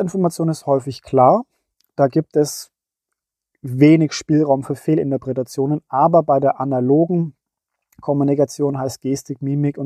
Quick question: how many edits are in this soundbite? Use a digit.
0